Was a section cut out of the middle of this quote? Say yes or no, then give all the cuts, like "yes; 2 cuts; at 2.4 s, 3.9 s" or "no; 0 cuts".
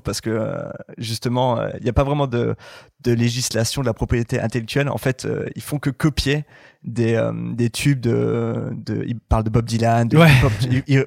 no; 0 cuts